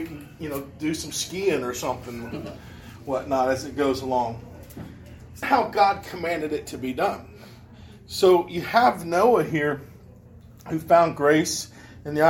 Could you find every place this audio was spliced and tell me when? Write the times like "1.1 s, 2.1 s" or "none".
5.4 s